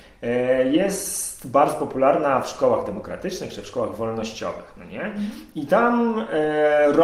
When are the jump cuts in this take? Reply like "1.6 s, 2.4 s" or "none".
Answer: none